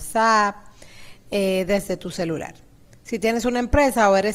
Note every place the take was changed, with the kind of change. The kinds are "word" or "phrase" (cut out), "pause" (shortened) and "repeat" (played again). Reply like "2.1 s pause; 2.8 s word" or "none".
none